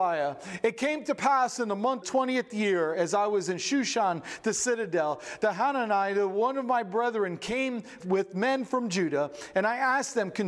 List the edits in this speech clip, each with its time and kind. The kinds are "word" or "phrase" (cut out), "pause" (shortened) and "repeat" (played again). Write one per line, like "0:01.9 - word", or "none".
0:02.0 - phrase
0:08.0 - word